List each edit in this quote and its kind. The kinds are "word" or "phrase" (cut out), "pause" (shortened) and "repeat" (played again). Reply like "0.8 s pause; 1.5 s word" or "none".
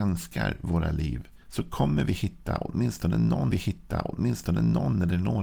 1.4 s pause; 3.5 s repeat